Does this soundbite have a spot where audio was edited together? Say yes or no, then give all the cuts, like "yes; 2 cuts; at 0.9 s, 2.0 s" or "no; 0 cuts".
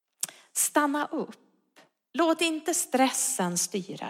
no; 0 cuts